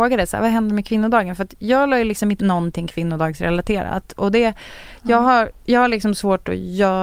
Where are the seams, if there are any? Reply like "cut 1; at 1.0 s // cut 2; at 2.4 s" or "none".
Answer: cut 1; at 2.4 s